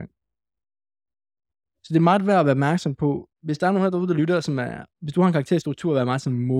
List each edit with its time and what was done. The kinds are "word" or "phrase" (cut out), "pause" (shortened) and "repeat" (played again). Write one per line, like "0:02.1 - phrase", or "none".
0:03.3 - pause
0:04.9 - pause